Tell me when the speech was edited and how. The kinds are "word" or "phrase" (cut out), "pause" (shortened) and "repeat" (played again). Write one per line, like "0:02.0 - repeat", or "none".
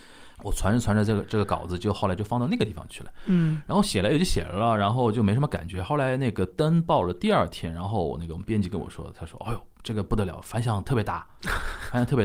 none